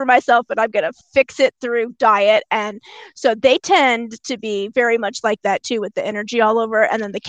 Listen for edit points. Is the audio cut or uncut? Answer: cut